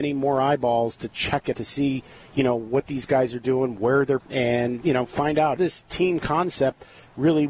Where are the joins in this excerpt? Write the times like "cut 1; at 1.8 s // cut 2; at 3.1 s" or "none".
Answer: cut 1; at 1.5 s // cut 2; at 4.2 s // cut 3; at 4.8 s // cut 4; at 5.6 s